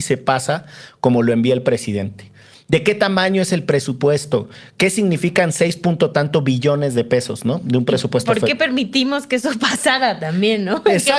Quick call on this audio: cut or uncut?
uncut